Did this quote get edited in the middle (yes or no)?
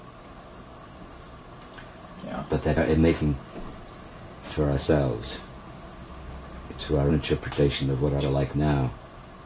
yes